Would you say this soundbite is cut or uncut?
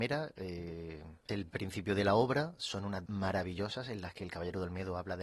cut